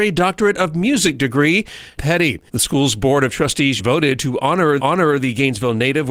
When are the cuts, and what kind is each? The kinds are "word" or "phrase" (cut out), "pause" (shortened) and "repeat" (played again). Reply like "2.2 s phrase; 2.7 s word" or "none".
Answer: 2.0 s phrase; 2.5 s pause; 3.8 s word; 4.8 s repeat